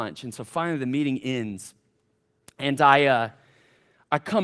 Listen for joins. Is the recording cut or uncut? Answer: uncut